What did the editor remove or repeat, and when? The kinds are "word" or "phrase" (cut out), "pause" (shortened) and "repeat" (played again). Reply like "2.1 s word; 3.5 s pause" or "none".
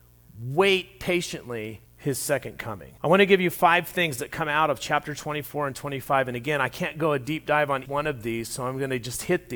1.9 s pause; 3.0 s pause; 7.8 s word